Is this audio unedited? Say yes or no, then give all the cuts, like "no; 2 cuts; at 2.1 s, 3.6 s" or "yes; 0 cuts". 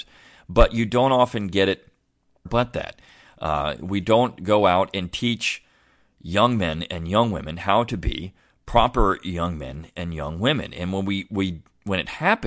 no; 1 cut; at 2.5 s